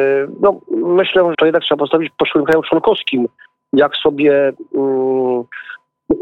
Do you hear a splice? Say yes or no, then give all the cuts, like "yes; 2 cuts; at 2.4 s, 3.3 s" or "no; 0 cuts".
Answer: yes; 1 cut; at 1.3 s